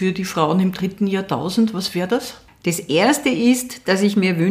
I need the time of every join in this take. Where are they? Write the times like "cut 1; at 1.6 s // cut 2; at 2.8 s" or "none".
none

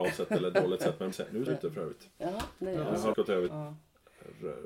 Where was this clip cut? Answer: cut 1; at 1.1 s // cut 2; at 1.5 s // cut 3; at 3.1 s // cut 4; at 3.5 s

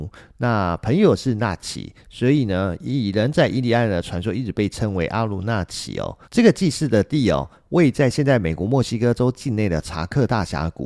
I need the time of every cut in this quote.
cut 1; at 6.2 s

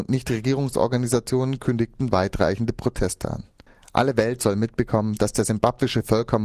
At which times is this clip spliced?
cut 1; at 3.7 s

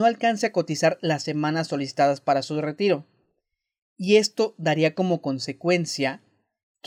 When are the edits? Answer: none

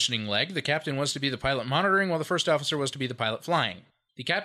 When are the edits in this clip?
none

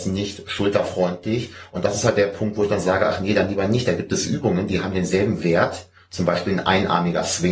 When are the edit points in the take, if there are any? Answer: none

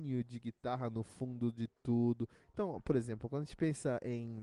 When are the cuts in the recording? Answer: none

